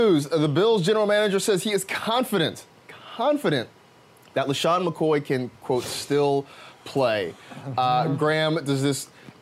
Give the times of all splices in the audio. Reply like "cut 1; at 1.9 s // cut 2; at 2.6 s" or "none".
none